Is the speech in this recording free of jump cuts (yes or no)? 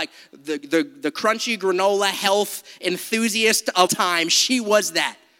no